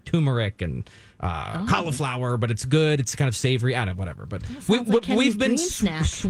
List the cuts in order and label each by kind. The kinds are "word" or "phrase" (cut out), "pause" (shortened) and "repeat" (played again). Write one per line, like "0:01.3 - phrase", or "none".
none

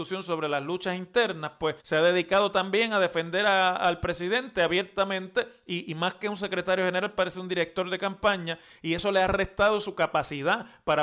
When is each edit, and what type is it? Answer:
0:01.8 - pause

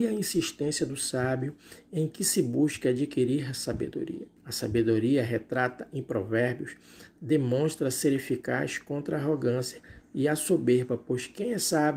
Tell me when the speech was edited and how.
0:04.4 - pause

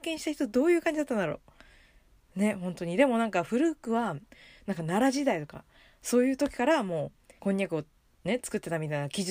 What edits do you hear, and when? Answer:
0:07.4 - pause

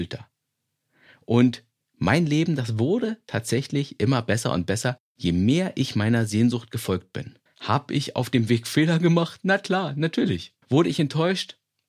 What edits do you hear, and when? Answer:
0:05.0 - pause
0:07.5 - pause
0:10.6 - pause

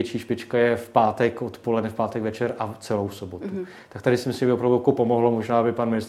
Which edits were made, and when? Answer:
none

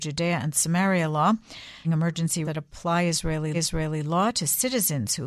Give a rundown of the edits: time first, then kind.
0:01.8 - word
0:02.4 - word
0:03.5 - repeat

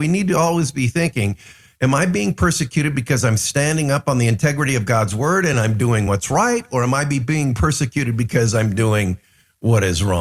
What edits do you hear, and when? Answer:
none

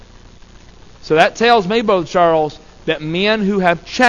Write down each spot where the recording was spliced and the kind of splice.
none

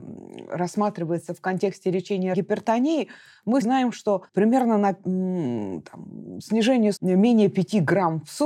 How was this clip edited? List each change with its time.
0:02.3 - word
0:03.6 - word
0:04.3 - pause
0:07.0 - word

